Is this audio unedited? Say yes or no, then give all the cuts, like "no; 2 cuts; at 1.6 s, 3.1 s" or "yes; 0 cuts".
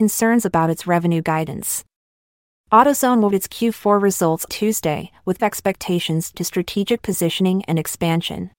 no; 4 cuts; at 3.3 s, 4.5 s, 5.4 s, 6.3 s